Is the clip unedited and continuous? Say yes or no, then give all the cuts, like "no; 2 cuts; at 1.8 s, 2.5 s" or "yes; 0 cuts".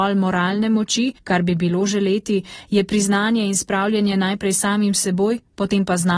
no; 1 cut; at 1.2 s